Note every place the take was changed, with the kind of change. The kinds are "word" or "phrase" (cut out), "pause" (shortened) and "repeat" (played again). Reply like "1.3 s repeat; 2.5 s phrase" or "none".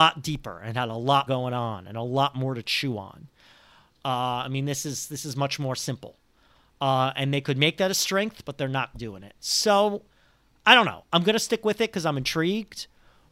1.3 s word; 8.9 s word